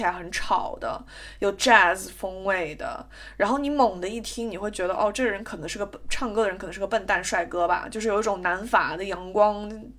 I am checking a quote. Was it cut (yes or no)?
no